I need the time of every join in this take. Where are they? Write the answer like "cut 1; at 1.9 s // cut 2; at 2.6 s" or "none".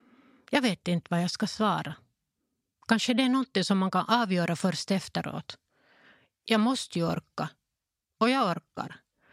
none